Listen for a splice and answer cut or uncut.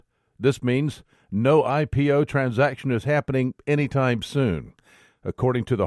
uncut